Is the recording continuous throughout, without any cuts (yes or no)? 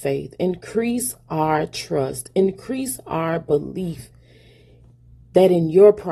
yes